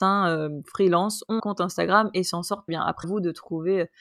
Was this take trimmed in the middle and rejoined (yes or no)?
yes